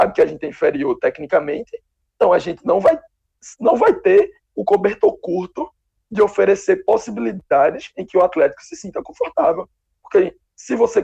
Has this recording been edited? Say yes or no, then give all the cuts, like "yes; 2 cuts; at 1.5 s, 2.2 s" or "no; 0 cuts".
no; 0 cuts